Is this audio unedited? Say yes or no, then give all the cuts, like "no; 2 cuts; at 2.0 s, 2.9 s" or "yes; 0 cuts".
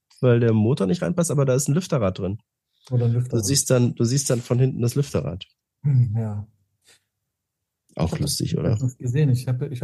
yes; 0 cuts